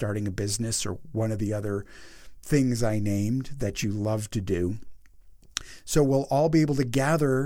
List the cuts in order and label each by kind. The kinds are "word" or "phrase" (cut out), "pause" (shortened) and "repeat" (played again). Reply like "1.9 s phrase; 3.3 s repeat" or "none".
none